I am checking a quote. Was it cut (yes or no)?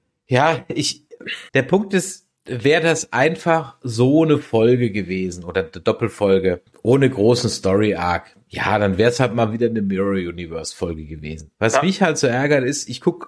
yes